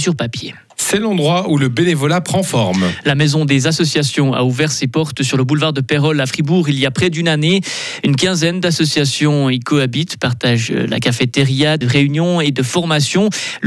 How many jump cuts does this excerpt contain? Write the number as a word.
one